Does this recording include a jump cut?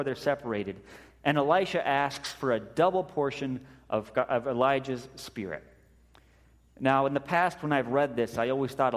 no; 0 cuts

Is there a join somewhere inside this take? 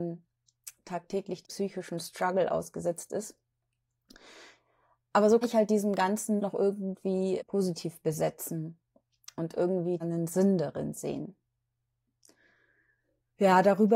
yes; 5 cuts; at 1.4 s, 5.4 s, 6.4 s, 7.4 s, 10.0 s

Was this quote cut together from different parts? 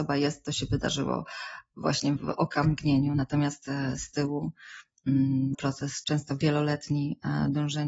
yes; 2 cuts; at 2.2 s, 5.5 s

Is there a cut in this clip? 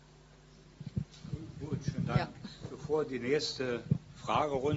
no; 0 cuts

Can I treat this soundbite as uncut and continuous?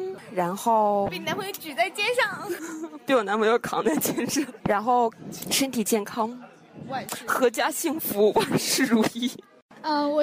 yes; 0 cuts

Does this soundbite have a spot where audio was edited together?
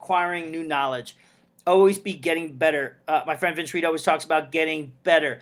no; 0 cuts

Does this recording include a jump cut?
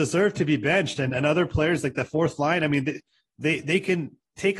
no; 0 cuts

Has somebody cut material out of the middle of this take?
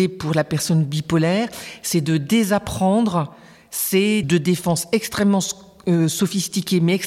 yes; 1 cut; at 4.2 s

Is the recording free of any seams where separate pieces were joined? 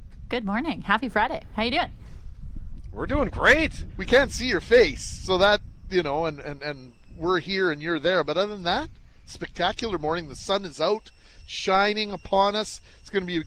yes; 0 cuts

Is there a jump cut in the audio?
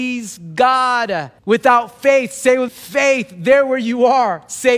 yes; 2 cuts; at 1.4 s, 2.7 s

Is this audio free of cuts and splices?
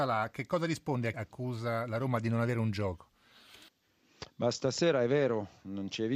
no; 1 cut; at 1.1 s

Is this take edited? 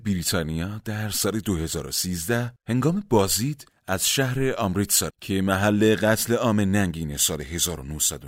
yes; 2 cuts; at 2.6 s, 5.1 s

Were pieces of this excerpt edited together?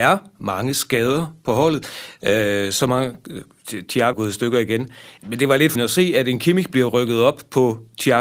yes; 3 cuts; at 4.1 s, 5.2 s, 5.7 s

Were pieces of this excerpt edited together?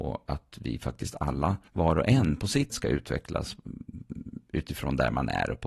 yes; 2 cuts; at 1.7 s, 2.7 s

